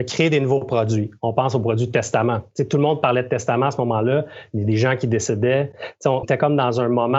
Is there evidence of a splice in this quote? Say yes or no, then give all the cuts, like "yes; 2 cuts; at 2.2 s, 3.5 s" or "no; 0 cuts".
yes; 1 cut; at 6.2 s